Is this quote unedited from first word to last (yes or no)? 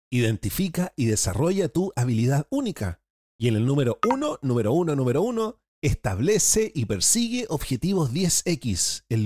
no